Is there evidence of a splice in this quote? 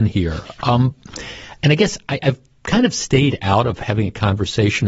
no; 0 cuts

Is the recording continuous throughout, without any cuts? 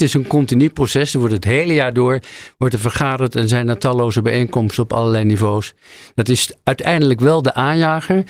yes; 0 cuts

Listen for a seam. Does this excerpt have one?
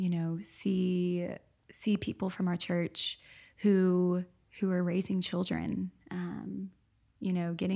no; 0 cuts

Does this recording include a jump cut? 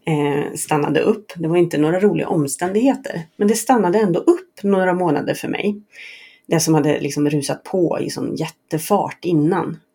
no; 0 cuts

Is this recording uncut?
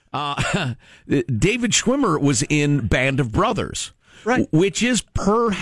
yes; 0 cuts

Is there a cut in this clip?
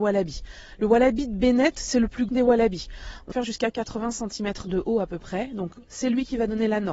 yes; 3 cuts; at 2.3 s, 3.3 s, 5.9 s

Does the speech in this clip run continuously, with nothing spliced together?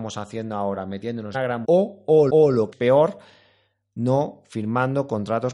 no; 4 cuts; at 1.3 s, 1.6 s, 2.3 s, 2.7 s

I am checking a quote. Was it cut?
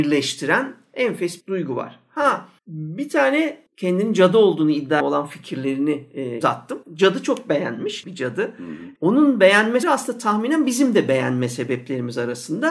yes; 9 cuts; at 1.4 s, 2.6 s, 3.7 s, 5.0 s, 6.4 s, 6.8 s, 8.0 s, 9.0 s, 9.8 s

